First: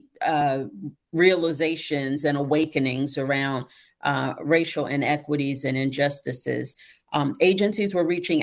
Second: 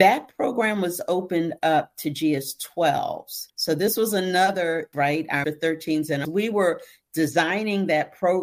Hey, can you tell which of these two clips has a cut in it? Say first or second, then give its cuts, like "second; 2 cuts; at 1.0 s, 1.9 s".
second; 4 cuts; at 3.5 s, 4.9 s, 5.4 s, 6.2 s